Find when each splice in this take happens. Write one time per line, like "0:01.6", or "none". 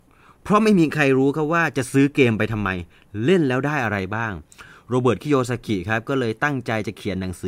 none